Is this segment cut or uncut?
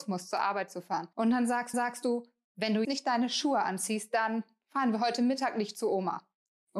cut